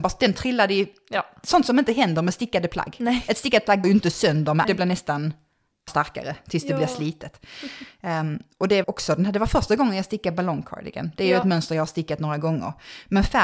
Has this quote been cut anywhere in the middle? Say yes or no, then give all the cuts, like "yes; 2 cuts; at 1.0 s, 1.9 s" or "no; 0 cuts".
yes; 4 cuts; at 3.8 s, 4.6 s, 5.9 s, 8.8 s